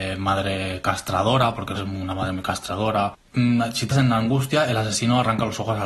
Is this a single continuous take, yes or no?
no